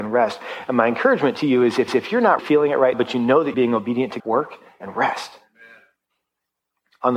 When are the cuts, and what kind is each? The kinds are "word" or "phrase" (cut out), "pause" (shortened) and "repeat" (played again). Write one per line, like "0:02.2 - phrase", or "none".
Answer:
0:01.9 - repeat
0:02.4 - word
0:02.9 - word
0:03.5 - word
0:04.2 - word